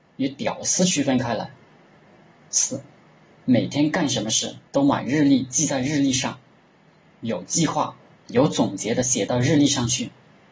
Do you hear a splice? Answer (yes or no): yes